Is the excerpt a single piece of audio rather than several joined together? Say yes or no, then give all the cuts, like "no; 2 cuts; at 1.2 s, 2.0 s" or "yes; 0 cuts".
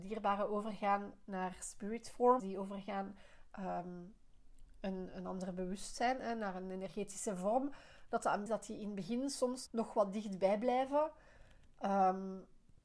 no; 4 cuts; at 2.4 s, 3.5 s, 8.5 s, 9.7 s